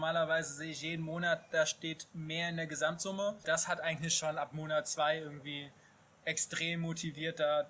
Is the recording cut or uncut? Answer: uncut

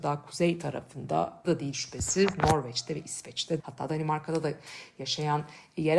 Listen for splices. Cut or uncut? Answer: cut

